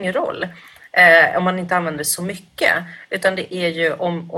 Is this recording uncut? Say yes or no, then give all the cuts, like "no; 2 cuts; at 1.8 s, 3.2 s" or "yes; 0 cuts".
yes; 0 cuts